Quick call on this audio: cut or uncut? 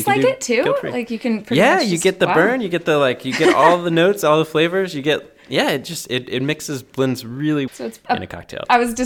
cut